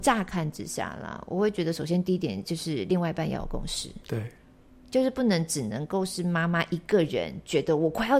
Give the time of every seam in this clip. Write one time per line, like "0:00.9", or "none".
none